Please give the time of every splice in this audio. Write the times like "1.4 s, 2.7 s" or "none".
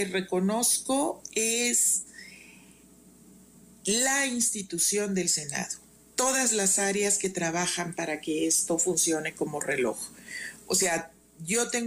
none